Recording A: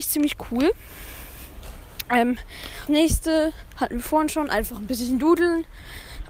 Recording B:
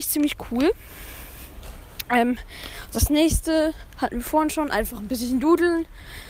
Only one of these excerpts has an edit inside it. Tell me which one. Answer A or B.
A